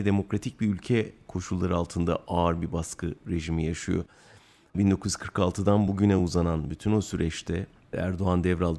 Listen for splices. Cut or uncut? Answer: uncut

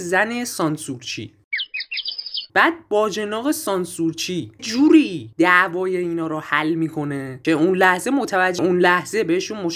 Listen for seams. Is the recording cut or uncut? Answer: cut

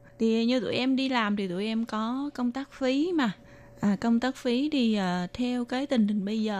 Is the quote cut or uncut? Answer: uncut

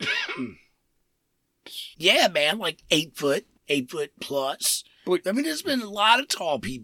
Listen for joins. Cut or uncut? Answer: cut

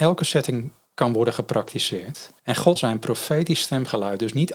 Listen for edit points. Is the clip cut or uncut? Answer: cut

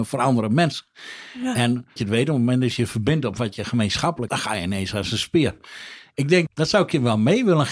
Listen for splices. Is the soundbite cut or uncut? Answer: cut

